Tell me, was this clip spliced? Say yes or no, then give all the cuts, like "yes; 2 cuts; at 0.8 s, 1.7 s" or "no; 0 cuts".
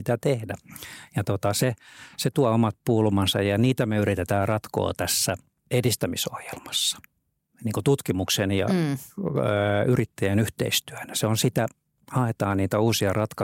no; 0 cuts